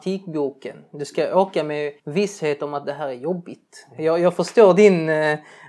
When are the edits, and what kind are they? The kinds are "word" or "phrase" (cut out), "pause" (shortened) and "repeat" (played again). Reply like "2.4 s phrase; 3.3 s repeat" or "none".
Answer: 2.0 s pause

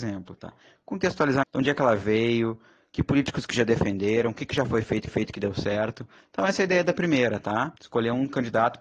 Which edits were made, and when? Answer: 1.4 s word; 5.1 s repeat; 7.8 s pause

